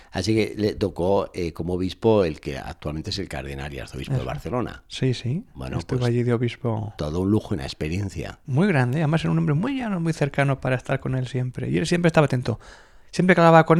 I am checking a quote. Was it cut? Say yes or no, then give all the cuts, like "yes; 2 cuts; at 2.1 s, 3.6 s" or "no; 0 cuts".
no; 0 cuts